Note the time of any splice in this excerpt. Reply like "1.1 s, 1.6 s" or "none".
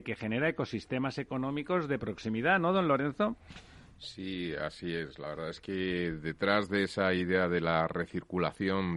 none